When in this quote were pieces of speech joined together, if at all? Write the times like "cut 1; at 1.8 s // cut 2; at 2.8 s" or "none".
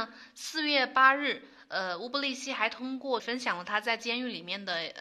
cut 1; at 3.2 s